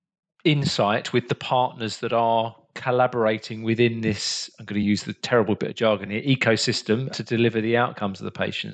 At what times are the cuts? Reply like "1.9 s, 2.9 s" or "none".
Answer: none